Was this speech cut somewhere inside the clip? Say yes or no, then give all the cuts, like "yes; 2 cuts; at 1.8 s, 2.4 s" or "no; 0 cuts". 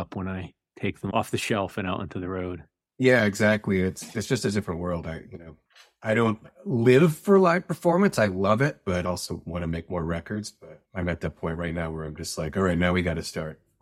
no; 0 cuts